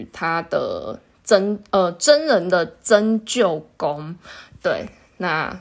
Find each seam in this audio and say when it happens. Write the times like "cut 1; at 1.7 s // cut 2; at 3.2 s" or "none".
none